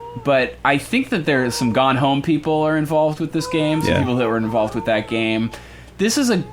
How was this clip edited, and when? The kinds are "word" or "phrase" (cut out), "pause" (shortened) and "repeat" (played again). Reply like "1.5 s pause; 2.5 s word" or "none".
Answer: none